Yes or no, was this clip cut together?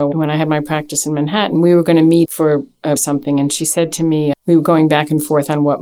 yes